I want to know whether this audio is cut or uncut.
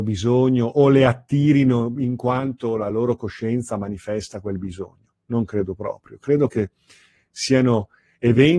uncut